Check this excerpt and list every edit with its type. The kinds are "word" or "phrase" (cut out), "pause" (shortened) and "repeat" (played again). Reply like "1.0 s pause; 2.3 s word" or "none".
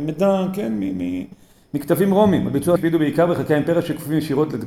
2.8 s word